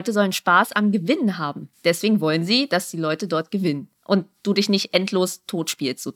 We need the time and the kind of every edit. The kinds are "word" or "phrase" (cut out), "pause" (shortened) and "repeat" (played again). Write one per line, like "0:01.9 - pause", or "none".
0:01.7 - pause
0:04.0 - pause